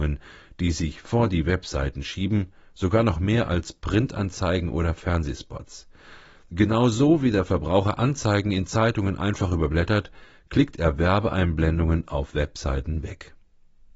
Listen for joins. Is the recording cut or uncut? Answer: uncut